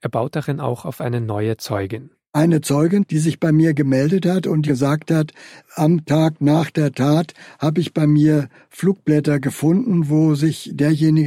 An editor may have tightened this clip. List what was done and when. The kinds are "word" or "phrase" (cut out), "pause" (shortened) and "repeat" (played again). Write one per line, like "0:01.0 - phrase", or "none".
0:04.7 - word